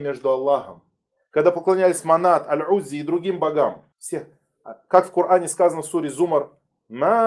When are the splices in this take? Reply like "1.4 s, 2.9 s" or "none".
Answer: 3.9 s